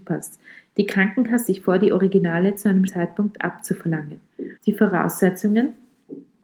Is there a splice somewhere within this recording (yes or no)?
yes